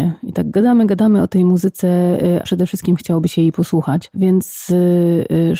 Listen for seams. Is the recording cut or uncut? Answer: cut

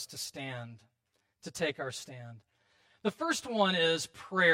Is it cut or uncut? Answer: uncut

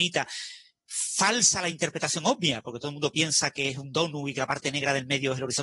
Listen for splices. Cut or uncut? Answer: uncut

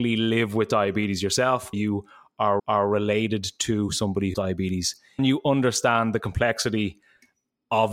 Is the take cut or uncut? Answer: cut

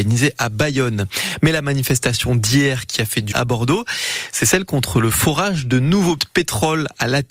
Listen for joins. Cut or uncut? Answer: cut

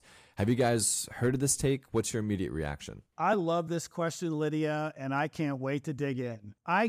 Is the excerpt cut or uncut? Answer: uncut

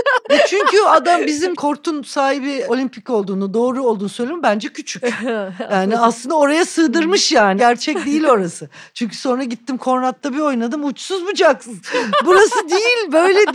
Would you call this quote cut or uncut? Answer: uncut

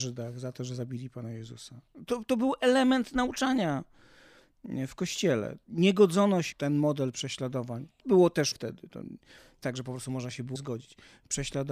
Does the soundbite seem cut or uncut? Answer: cut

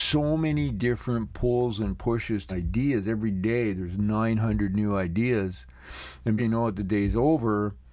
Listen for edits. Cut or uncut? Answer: cut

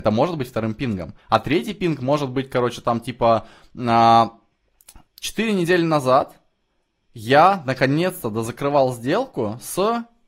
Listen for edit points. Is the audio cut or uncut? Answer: cut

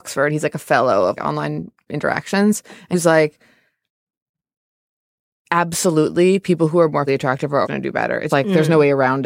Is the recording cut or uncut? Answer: cut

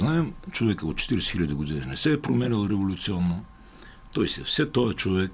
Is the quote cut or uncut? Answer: uncut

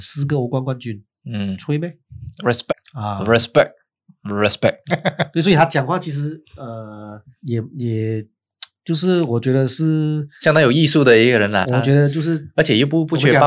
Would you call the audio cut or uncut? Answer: cut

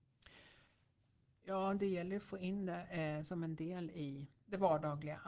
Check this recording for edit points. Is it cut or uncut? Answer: uncut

